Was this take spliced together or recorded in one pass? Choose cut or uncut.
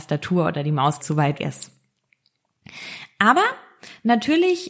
cut